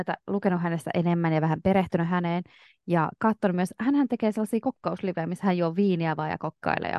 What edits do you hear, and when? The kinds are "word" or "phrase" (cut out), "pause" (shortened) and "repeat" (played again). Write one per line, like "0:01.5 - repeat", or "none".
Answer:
none

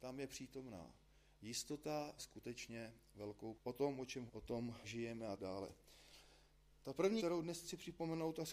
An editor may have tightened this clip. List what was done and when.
0:02.2 - word
0:03.5 - word
0:04.3 - word
0:04.8 - word
0:05.4 - word
0:07.2 - word

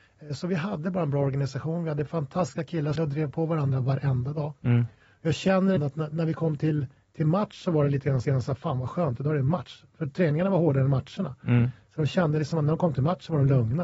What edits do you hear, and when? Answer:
0:03.0 - phrase
0:05.8 - word
0:08.2 - repeat

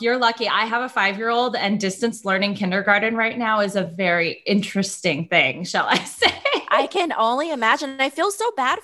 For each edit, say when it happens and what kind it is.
none

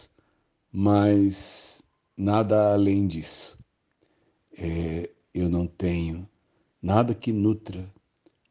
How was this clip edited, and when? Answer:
none

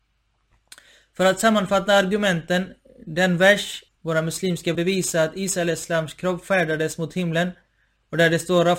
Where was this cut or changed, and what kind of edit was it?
0:03.9 - phrase
0:04.7 - phrase

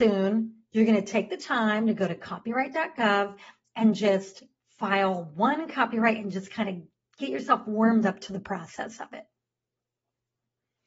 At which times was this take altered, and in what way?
none

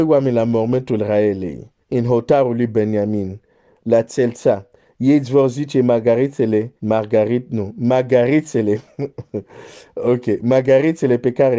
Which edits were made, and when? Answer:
0:01.8 - pause
0:06.8 - pause

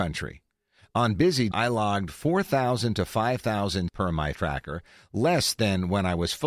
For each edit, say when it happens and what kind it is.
0:01.5 - word
0:03.9 - word
0:04.3 - word

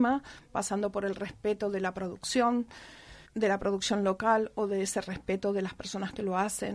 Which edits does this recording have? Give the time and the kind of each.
0:03.3 - pause

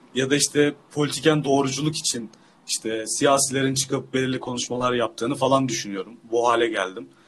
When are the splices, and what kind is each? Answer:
none

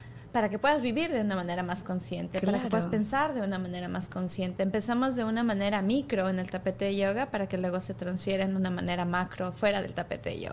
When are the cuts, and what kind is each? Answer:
none

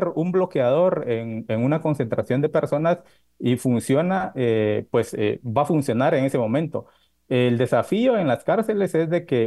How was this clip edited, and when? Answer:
none

